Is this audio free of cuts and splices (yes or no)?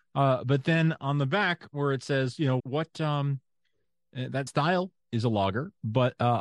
no